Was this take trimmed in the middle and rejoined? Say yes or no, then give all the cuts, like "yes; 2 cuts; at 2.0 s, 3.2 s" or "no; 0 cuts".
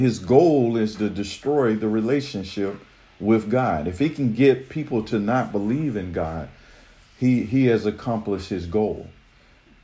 no; 0 cuts